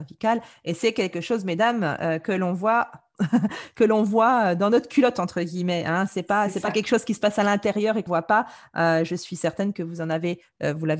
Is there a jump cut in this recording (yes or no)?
yes